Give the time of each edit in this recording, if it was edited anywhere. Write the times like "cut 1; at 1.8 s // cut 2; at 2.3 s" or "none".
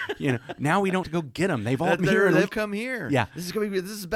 cut 1; at 1.0 s // cut 2; at 2.0 s // cut 3; at 2.5 s

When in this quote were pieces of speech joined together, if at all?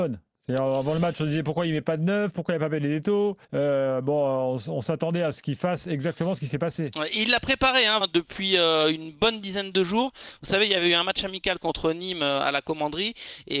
cut 1; at 3.4 s // cut 2; at 8.0 s

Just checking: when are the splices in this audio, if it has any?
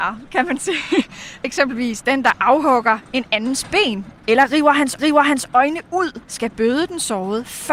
cut 1; at 1.4 s // cut 2; at 4.1 s // cut 3; at 5.0 s // cut 4; at 6.2 s

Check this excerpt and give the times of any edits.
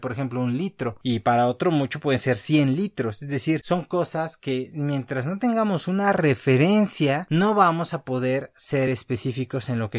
none

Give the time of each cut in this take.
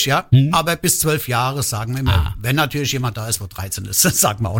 none

